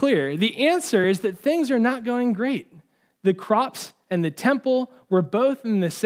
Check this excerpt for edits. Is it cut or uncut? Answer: uncut